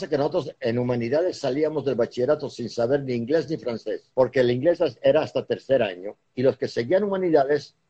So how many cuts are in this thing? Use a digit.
2